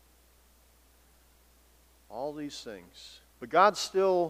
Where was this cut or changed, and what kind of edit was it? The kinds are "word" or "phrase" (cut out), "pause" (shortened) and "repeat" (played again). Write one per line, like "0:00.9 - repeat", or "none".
0:03.3 - pause